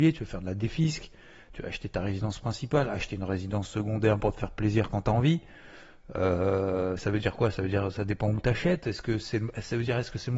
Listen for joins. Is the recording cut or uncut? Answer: uncut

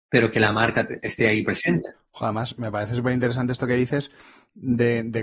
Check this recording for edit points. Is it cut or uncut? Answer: uncut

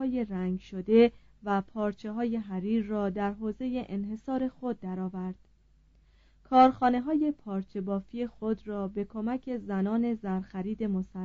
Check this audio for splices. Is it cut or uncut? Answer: uncut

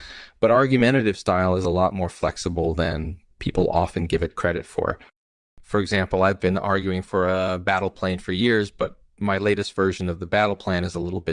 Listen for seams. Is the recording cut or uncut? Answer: uncut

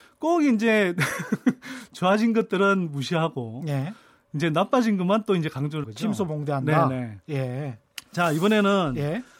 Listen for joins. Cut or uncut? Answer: cut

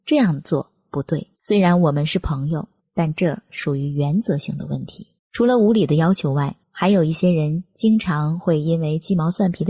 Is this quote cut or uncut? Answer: cut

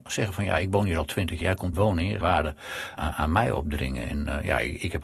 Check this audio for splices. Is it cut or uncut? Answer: cut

